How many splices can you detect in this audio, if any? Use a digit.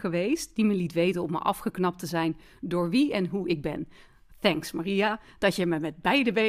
0